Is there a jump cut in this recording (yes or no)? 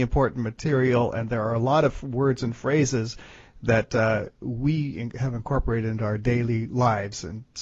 no